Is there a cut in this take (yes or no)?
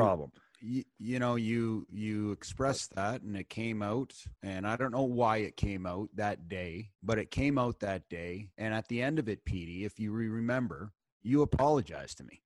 yes